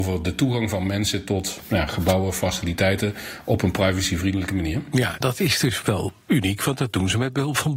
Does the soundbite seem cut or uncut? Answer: cut